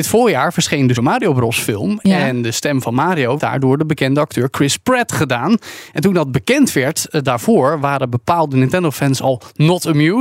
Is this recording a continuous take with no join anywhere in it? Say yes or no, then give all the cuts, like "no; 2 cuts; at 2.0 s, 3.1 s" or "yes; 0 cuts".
no; 2 cuts; at 1.0 s, 3.4 s